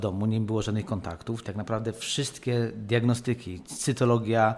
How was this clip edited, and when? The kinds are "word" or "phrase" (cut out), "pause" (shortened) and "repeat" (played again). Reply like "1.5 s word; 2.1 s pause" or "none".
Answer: 1.4 s word